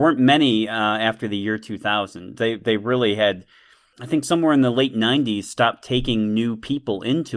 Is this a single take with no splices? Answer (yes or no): yes